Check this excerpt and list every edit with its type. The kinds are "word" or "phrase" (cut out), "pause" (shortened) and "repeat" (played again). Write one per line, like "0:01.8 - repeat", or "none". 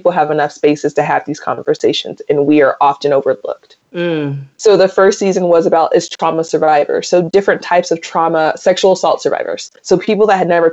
0:03.9 - pause
0:09.8 - pause

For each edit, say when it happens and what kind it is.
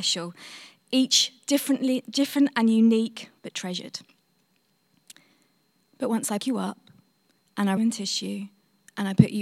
0:03.4 - pause
0:06.4 - word
0:07.8 - phrase

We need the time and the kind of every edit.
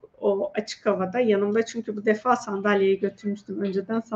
none

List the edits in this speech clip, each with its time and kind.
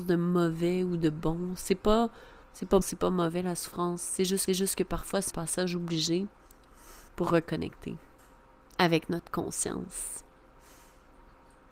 0:02.4 - pause
0:02.8 - word
0:04.5 - repeat
0:05.3 - word
0:07.1 - pause
0:08.2 - pause

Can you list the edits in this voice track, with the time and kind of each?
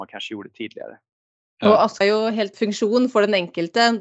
0:02.0 - word
0:02.5 - word

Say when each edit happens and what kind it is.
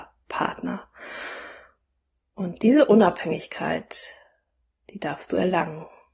none

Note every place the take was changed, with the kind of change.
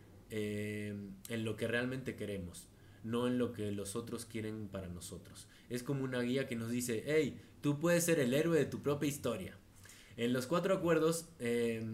none

